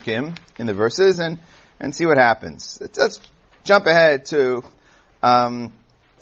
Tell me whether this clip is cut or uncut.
uncut